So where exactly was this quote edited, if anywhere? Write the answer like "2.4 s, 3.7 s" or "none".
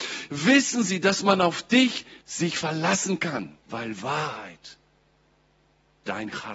2.2 s, 3.6 s